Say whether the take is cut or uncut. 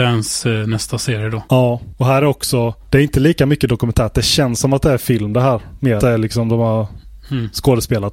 cut